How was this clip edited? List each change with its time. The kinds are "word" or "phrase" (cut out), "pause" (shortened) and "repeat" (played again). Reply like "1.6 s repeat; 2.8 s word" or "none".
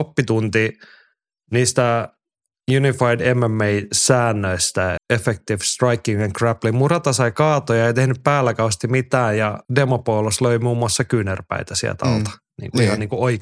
5.0 s word; 9.6 s pause

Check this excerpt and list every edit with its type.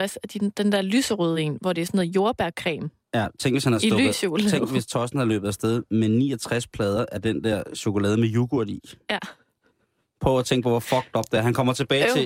none

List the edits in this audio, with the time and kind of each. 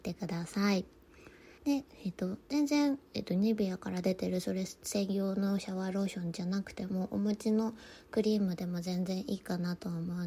1.6 s pause; 3.1 s pause

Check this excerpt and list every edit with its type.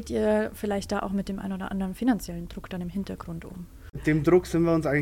none

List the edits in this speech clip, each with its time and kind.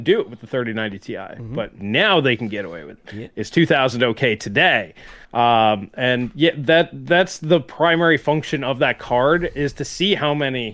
1.8 s word; 5.2 s pause

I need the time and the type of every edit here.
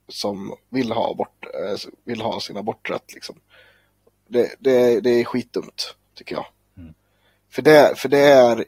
none

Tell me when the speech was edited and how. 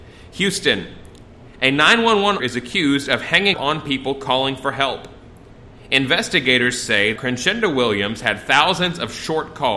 2.4 s word; 3.5 s word; 7.2 s word

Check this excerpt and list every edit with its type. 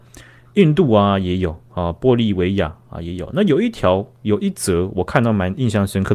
none

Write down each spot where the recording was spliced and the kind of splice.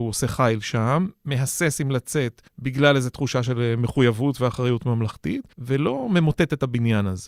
2.5 s pause; 5.5 s pause

